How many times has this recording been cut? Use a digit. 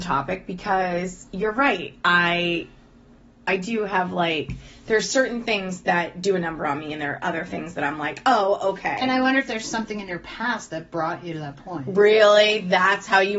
0